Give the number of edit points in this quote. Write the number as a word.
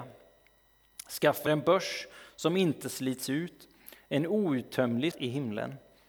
two